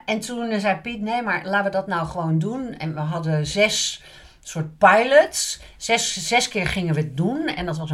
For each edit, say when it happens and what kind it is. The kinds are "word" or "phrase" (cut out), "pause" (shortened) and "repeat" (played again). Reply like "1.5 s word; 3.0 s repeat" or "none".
none